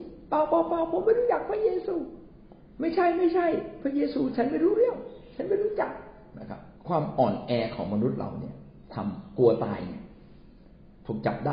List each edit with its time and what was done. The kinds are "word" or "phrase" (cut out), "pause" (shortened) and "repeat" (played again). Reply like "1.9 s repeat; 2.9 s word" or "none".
6.8 s pause